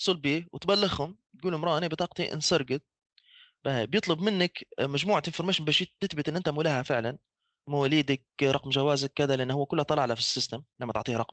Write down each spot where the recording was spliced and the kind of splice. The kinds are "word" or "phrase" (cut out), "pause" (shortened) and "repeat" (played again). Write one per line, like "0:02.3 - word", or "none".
none